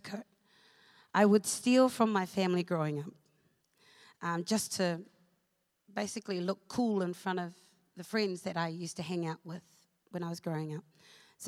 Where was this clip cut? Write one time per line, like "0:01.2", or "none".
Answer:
none